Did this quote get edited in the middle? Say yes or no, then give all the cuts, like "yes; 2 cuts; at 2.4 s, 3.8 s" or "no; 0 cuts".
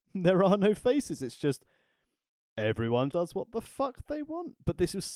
yes; 1 cut; at 3.1 s